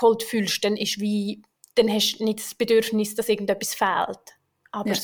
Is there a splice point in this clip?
no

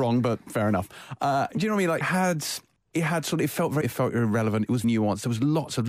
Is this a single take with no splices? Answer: no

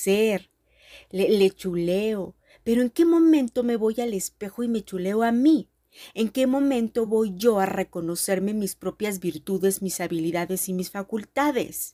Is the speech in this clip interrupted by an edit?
no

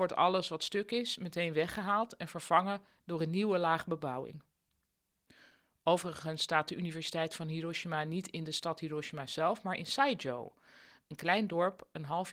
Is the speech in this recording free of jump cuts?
yes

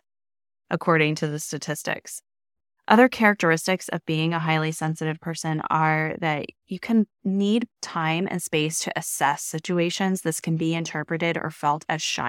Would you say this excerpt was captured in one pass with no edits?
no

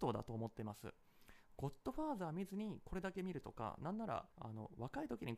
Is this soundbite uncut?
no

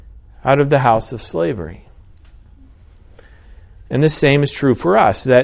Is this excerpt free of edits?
yes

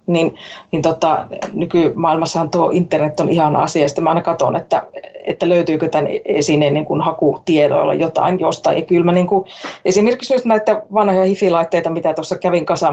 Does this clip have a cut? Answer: no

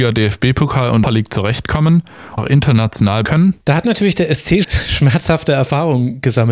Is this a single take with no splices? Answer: no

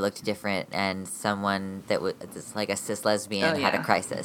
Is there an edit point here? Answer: no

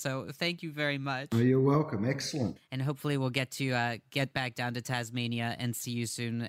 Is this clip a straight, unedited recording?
yes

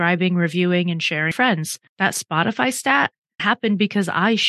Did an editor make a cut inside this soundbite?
yes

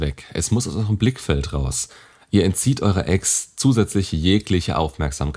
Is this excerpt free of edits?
yes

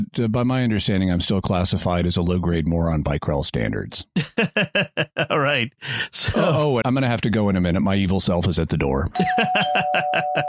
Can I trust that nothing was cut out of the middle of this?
no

